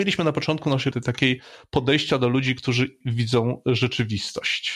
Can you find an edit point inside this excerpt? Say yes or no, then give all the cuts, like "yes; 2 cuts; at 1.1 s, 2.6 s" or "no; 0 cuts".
yes; 2 cuts; at 0.9 s, 3.0 s